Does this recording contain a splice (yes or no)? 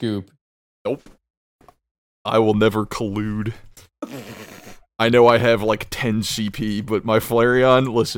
no